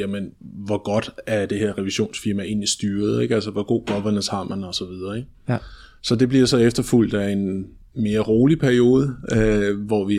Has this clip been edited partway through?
no; 0 cuts

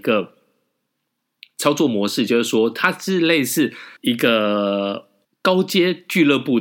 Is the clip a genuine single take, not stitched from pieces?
no; 2 cuts; at 4.0 s, 5.2 s

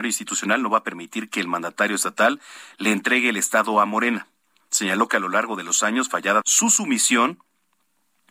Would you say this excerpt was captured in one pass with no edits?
no; 1 cut; at 6.4 s

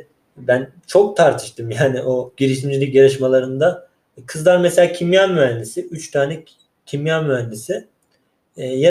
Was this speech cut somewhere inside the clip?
no; 0 cuts

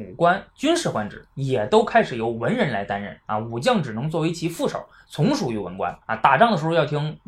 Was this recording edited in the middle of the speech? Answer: yes; 1 cut; at 6.0 s

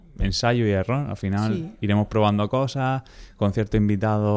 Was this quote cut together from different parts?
no; 0 cuts

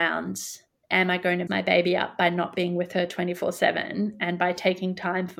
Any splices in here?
yes; 1 cut; at 1.5 s

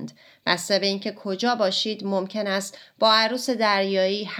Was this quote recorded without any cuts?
yes; 0 cuts

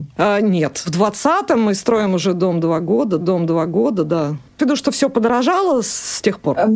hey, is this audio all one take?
no; 2 cuts; at 3.2 s, 4.6 s

